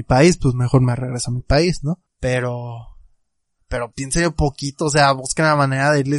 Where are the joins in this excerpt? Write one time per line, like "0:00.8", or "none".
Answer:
0:02.1
0:03.9

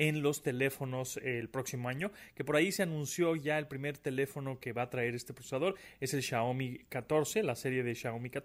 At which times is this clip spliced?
none

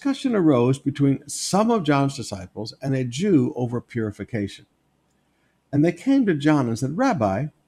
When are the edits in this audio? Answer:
none

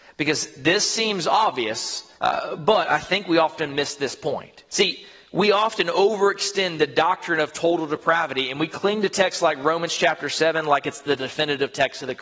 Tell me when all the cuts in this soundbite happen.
0:02.2
0:04.7

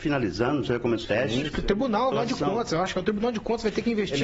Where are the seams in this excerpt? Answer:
0:01.0
0:02.1

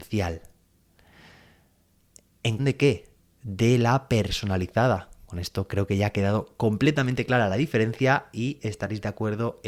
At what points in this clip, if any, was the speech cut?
0:02.6

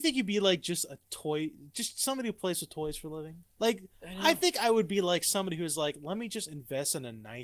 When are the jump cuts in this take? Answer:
0:03.5

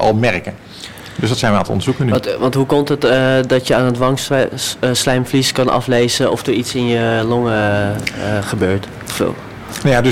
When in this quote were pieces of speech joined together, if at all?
none

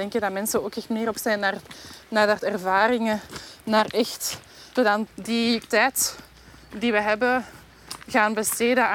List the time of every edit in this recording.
0:01.1
0:02.4
0:04.8
0:05.1
0:05.6

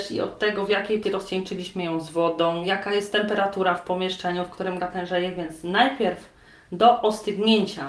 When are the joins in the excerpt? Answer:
0:01.0
0:04.8

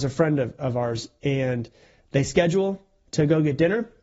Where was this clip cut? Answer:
none

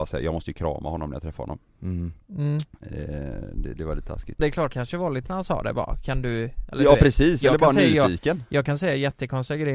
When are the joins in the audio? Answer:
0:04.4
0:04.7
0:05.3

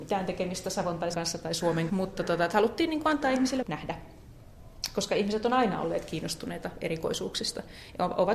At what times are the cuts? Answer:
0:01.1
0:01.9
0:03.6

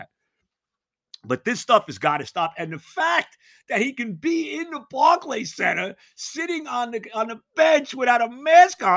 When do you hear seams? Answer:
none

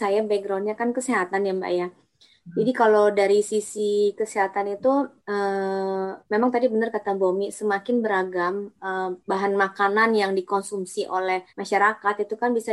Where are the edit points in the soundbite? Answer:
0:05.2
0:06.2
0:09.2
0:11.5

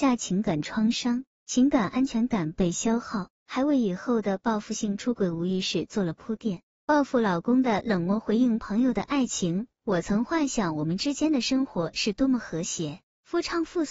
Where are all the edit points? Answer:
0:03.3

